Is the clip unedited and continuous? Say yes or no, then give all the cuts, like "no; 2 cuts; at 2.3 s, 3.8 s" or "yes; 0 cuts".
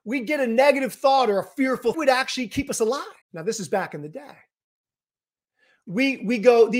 no; 2 cuts; at 1.9 s, 3.2 s